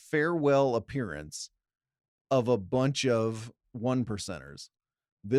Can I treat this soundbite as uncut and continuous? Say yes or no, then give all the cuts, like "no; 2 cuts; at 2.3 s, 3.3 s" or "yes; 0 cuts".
yes; 0 cuts